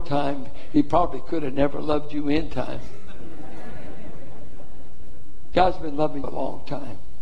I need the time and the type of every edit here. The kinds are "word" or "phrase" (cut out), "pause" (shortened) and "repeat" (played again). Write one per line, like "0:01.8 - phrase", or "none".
0:06.2 - word